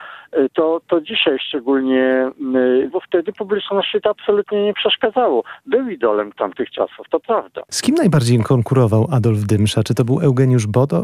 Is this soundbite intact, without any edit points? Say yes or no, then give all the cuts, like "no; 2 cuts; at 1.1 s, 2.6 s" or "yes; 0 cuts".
no; 1 cut; at 2.9 s